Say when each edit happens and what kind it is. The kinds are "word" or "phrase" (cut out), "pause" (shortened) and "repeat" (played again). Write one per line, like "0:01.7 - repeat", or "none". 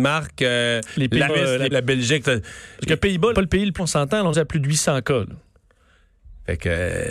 0:01.3 - word
0:01.7 - word
0:03.3 - word
0:03.8 - word
0:04.3 - word